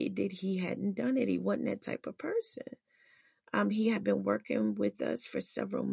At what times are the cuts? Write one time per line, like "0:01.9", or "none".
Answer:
none